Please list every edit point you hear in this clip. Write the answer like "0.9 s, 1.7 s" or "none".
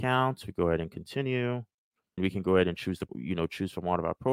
2.2 s, 3.1 s